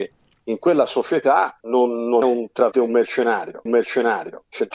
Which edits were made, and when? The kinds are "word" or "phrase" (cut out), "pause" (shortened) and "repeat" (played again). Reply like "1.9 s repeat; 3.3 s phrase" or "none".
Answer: 1.6 s pause; 2.2 s word; 2.7 s word; 3.7 s repeat